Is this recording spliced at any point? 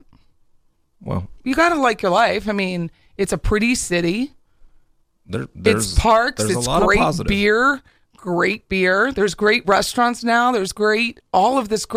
no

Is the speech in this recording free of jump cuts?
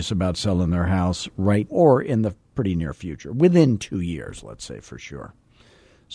no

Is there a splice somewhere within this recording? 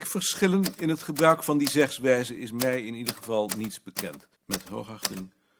yes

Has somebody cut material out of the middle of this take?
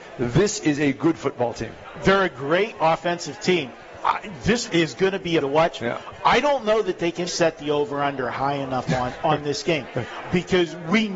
yes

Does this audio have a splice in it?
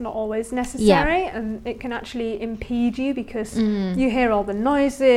no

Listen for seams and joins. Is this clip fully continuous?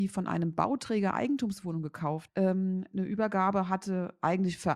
no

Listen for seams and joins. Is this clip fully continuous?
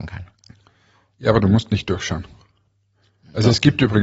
yes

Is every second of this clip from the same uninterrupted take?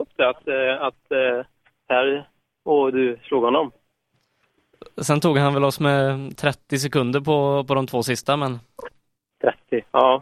yes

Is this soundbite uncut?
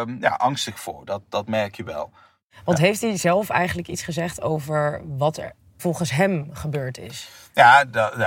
no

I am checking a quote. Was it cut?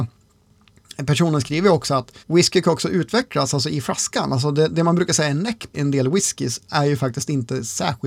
yes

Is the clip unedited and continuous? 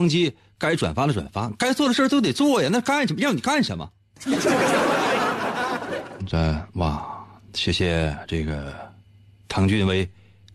no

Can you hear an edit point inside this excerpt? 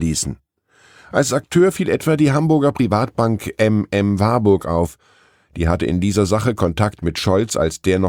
no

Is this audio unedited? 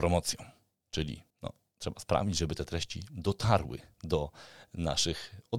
no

